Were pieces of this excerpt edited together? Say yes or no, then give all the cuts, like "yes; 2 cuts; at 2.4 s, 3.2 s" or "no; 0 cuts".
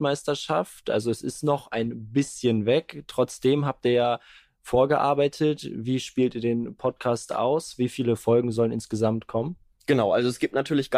no; 0 cuts